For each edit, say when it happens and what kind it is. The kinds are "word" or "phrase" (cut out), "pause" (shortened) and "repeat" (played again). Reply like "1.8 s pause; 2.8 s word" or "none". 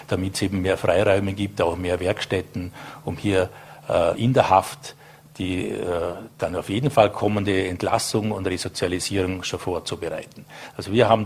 4.1 s word